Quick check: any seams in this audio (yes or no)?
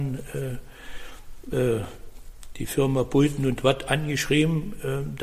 no